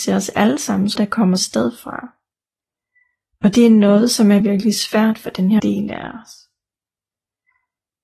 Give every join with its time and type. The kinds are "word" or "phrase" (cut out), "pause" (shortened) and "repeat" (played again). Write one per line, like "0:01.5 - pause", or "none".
0:01.0 - word
0:01.4 - word
0:04.4 - word
0:05.6 - word